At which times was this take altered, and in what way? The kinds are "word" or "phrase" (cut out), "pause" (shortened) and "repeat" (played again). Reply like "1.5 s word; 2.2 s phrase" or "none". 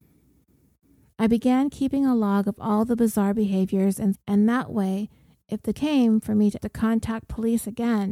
4.1 s word; 5.7 s word; 6.6 s phrase